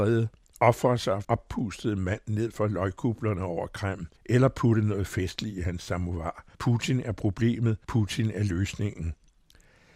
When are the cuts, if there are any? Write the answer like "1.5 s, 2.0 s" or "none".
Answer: 1.2 s, 4.2 s, 6.5 s, 7.8 s